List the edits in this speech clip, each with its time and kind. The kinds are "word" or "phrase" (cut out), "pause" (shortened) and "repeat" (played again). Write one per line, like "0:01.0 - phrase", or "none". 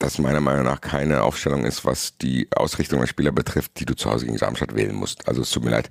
none